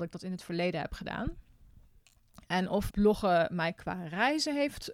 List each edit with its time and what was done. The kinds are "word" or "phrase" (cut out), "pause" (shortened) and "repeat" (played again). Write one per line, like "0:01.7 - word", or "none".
0:02.9 - word